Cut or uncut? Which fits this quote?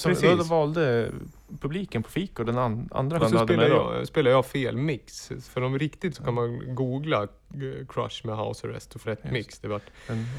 cut